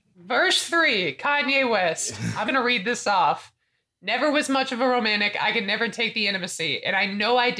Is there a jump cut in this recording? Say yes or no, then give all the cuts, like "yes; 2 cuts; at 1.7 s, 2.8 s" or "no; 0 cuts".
yes; 1 cut; at 2.5 s